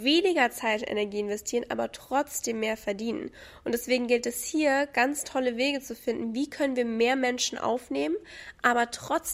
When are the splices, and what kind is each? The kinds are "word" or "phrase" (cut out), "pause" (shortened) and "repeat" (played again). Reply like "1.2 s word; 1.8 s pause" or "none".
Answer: none